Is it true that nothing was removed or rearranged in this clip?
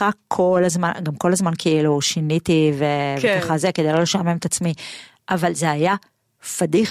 yes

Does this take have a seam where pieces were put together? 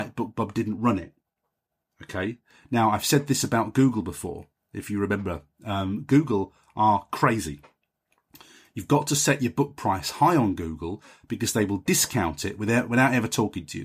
no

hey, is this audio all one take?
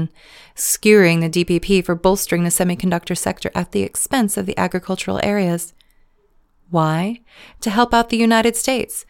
yes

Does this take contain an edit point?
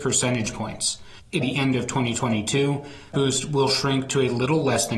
yes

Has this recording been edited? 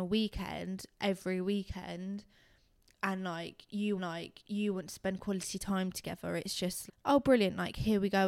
yes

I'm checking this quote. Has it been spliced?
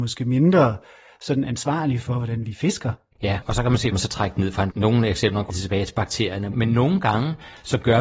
yes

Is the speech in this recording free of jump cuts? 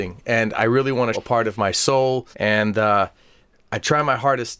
no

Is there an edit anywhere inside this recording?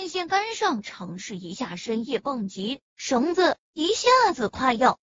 yes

